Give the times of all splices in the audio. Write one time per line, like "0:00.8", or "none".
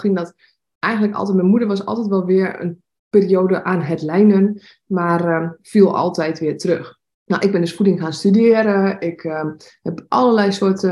0:07.1